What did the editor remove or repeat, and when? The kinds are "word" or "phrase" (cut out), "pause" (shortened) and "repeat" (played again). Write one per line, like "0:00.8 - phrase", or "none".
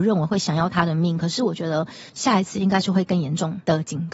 0:02.1 - pause

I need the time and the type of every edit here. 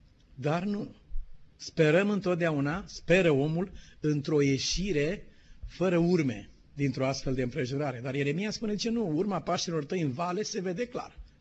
0:01.5 - pause

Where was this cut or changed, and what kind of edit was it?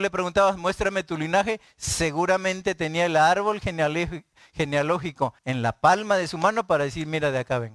0:05.4 - pause

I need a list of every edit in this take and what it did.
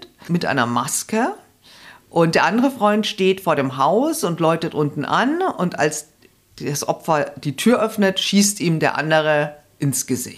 none

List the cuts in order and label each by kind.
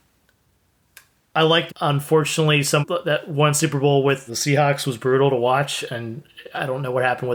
0:01.7 - word
0:02.8 - word
0:04.3 - word

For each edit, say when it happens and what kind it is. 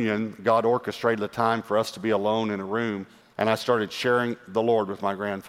none

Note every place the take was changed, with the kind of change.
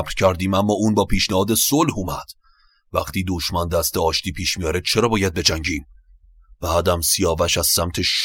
none

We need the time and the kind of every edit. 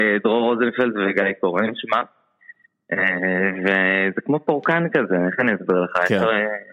none

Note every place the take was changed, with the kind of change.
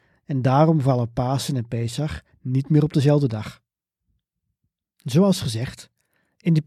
none

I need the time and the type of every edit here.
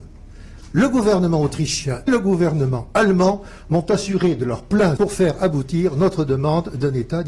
0:02.1 - word
0:05.0 - word

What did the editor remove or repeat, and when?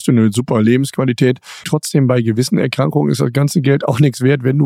0:01.6 - word

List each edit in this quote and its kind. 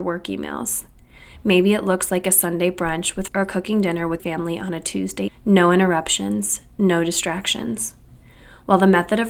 0:03.3 - word
0:04.2 - word
0:05.3 - word

